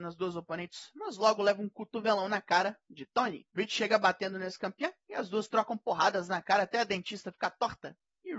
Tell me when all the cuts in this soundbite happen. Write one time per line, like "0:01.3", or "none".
0:03.5